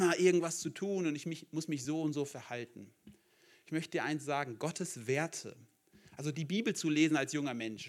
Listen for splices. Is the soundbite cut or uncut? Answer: uncut